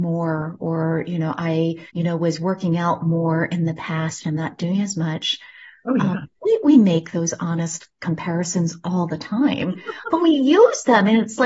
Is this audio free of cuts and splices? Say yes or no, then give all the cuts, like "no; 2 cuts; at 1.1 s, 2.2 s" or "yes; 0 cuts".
no; 1 cut; at 1.9 s